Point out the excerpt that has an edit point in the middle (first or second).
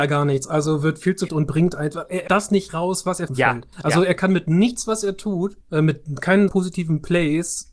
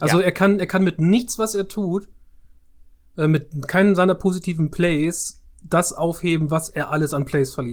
first